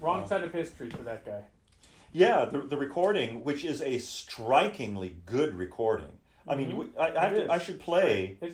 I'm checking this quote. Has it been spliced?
no; 0 cuts

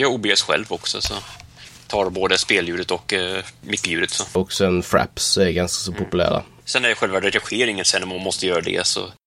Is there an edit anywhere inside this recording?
no; 0 cuts

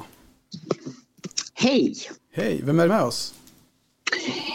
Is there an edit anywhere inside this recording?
yes; 1 cut; at 2.9 s

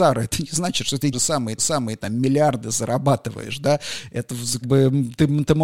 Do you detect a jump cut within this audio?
yes; 3 cuts; at 1.1 s, 1.6 s, 4.6 s

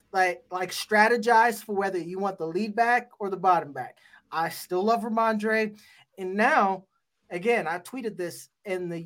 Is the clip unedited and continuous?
yes; 0 cuts

